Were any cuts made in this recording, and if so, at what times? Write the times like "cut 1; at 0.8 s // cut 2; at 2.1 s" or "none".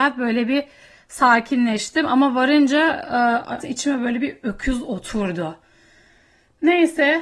cut 1; at 3.6 s